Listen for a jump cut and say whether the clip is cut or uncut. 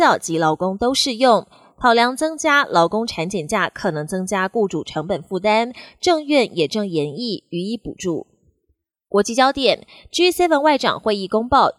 uncut